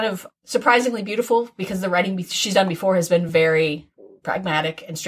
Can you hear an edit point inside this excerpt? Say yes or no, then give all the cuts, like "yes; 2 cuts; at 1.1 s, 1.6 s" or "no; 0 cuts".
no; 0 cuts